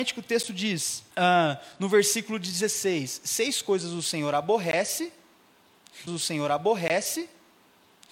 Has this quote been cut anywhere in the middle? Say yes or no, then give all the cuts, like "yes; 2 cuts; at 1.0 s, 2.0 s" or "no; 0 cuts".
yes; 2 cuts; at 1.1 s, 6.1 s